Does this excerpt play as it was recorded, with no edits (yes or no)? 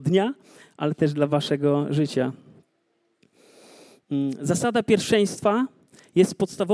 yes